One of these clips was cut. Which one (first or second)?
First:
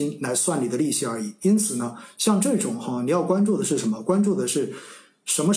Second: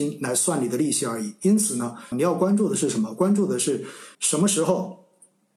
second